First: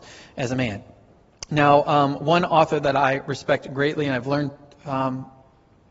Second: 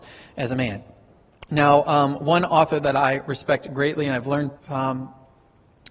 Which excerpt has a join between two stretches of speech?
second; 1 cut; at 4.6 s

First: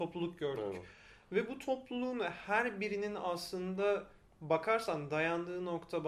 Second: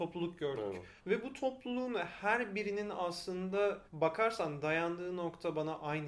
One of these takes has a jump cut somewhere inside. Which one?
second; 2 cuts; at 1.0 s, 3.9 s

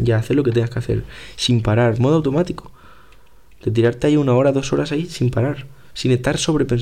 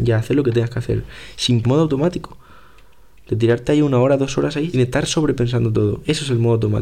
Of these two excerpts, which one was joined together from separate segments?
second; 2 cuts; at 1.6 s, 4.7 s

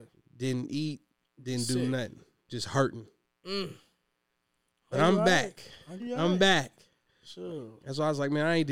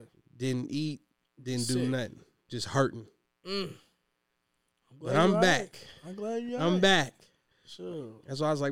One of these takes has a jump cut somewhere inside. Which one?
first; 2 cuts; at 4.9 s, 6.0 s

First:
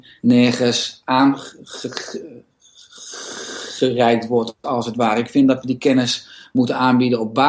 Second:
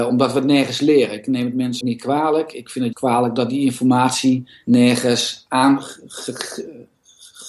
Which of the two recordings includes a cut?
second; 2 cuts; at 1.8 s, 2.9 s

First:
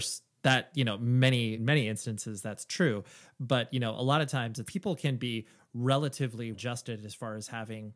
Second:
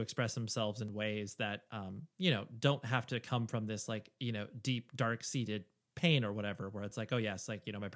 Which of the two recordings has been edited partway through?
first; 3 cuts; at 1.6 s, 4.7 s, 6.5 s

